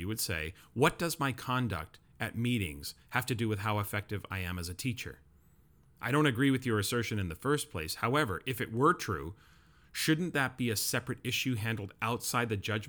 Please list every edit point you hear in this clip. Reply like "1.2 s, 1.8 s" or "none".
none